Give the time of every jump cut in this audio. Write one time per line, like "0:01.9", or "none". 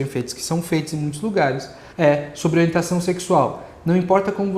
0:01.9